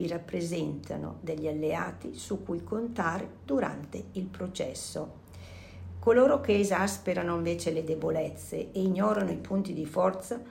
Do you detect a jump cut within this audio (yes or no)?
no